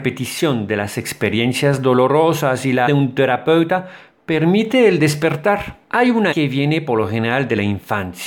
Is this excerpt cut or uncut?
cut